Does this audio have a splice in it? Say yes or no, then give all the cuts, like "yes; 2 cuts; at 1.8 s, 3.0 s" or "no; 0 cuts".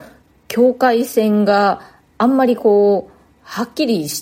no; 0 cuts